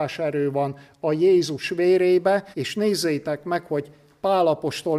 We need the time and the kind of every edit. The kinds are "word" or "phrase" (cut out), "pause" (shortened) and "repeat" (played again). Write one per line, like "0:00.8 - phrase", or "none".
0:02.5 - pause